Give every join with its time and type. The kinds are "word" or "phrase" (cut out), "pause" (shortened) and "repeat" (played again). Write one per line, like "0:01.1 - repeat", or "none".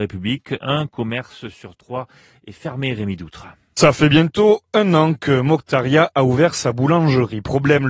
none